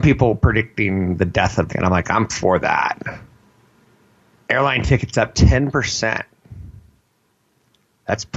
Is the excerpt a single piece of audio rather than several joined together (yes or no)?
no